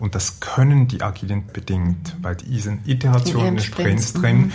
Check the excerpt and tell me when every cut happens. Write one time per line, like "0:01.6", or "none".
0:01.5
0:02.4